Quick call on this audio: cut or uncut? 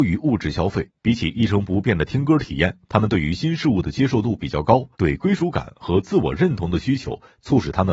cut